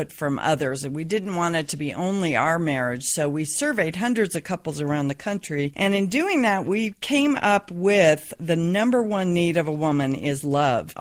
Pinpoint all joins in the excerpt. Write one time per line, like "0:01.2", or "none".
none